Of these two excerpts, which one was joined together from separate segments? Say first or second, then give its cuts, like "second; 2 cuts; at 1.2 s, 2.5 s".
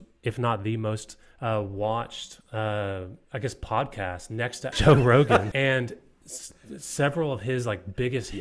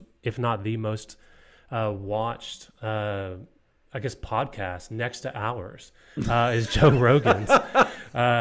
first; 4 cuts; at 1.3 s, 3.2 s, 4.7 s, 5.5 s